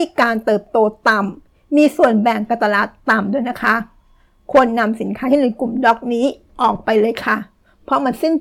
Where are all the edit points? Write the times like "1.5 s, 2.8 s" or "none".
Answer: none